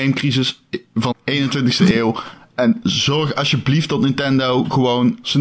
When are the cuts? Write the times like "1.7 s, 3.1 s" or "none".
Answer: 1.1 s